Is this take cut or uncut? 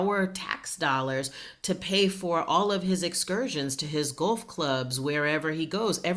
uncut